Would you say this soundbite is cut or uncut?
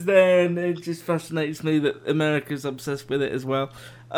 uncut